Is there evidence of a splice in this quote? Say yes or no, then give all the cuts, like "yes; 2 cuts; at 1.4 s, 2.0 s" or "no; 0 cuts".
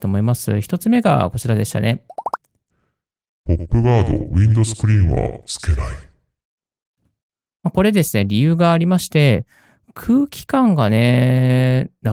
no; 0 cuts